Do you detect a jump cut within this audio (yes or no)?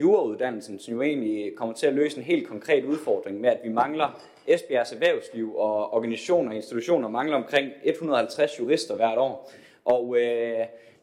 no